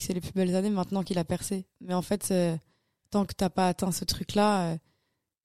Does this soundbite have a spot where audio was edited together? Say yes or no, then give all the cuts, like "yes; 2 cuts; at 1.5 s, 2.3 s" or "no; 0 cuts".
no; 0 cuts